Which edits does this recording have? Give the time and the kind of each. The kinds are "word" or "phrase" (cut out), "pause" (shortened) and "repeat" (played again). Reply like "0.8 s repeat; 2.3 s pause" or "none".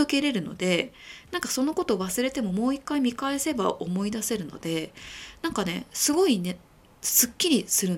none